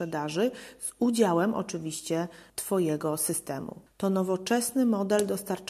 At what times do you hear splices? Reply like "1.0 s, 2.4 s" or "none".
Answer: 2.5 s, 3.9 s

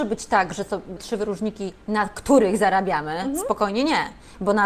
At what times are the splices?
1.0 s

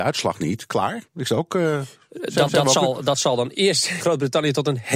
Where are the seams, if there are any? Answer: 1.1 s, 2.5 s, 4.0 s

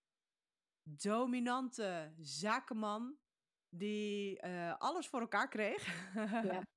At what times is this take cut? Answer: 3.6 s

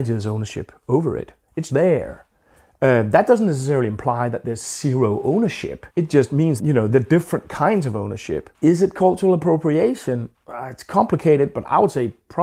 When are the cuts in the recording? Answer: 1.7 s, 5.9 s, 6.6 s, 6.9 s, 8.5 s, 10.3 s

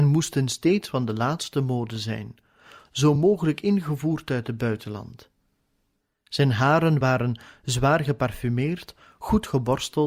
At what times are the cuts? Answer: none

